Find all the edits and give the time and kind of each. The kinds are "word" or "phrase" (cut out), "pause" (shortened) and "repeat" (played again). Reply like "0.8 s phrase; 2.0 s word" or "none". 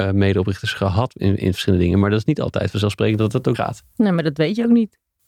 3.5 s word